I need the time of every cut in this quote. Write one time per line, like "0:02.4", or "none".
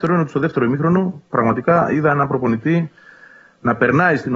none

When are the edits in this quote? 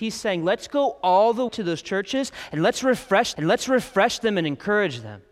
0:01.5
0:03.3

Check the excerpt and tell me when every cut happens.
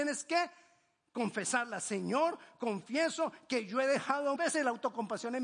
0:04.4

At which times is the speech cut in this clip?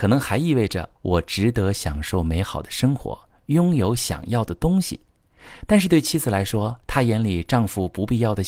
0:01.0
0:06.8

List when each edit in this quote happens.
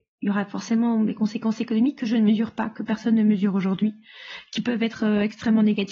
none

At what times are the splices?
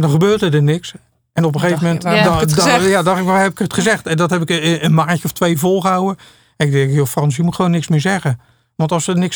none

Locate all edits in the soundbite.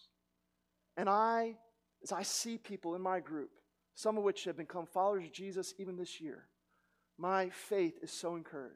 none

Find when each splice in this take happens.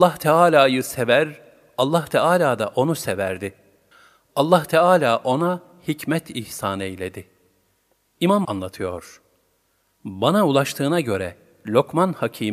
0:08.4

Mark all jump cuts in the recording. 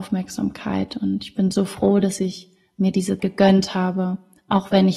0:03.2

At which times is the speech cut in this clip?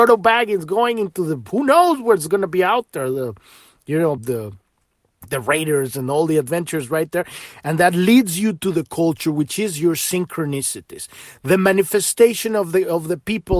0:04.2

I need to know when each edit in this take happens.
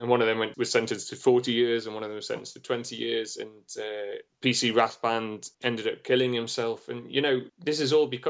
0:05.5

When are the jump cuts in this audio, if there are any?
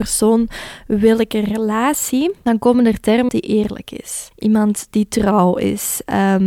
0:03.3
0:04.3

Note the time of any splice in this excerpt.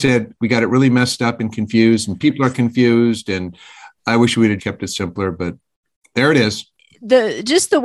0:04.6

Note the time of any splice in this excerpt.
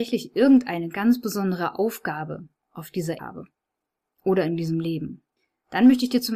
0:03.2
0:05.4

